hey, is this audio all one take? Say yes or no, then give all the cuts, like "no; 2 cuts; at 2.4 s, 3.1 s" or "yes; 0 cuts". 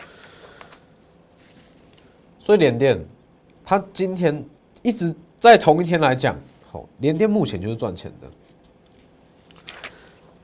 yes; 0 cuts